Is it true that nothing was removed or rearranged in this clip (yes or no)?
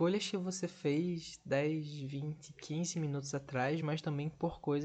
yes